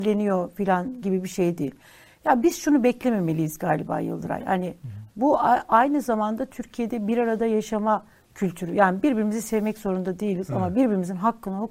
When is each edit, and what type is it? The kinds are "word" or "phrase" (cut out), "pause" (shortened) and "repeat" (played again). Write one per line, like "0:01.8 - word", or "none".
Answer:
none